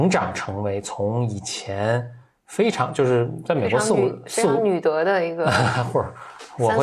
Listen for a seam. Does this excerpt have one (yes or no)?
no